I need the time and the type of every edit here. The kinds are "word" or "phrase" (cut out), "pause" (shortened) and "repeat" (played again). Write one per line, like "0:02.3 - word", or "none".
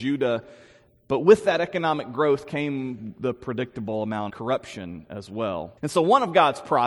0:04.3 - word
0:05.8 - pause